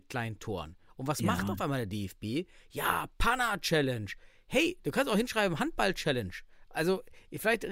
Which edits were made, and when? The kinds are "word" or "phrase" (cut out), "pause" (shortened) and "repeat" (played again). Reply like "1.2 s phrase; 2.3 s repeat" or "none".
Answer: none